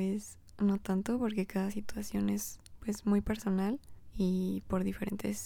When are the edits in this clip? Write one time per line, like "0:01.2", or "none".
none